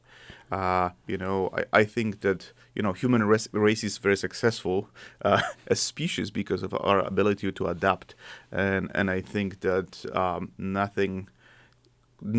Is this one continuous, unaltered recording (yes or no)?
yes